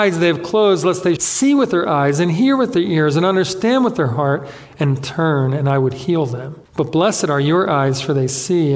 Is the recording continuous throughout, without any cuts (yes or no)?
no